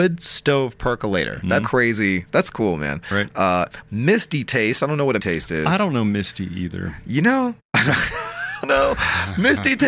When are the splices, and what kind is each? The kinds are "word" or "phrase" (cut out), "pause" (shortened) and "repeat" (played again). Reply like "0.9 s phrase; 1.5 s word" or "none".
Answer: 1.6 s word; 5.2 s word; 7.6 s pause; 8.6 s word